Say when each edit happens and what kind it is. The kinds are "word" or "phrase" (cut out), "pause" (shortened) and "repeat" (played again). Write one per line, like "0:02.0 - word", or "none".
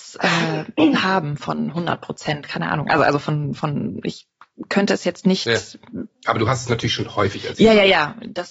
0:06.2 - pause